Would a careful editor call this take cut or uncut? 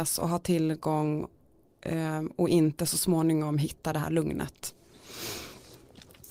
uncut